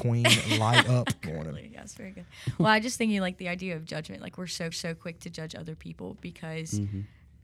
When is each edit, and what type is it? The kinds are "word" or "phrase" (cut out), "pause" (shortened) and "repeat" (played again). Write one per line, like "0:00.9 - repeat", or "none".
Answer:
0:01.2 - phrase
0:04.7 - repeat